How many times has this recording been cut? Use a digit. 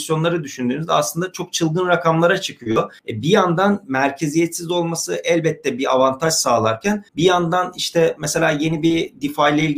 2